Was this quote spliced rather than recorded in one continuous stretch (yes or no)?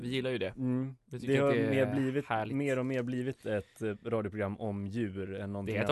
no